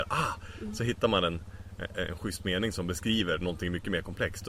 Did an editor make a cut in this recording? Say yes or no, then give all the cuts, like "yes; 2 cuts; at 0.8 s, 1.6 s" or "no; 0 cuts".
no; 0 cuts